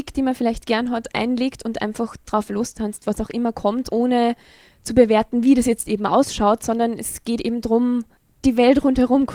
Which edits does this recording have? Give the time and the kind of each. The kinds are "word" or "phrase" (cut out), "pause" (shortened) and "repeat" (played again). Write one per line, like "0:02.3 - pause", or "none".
0:03.9 - word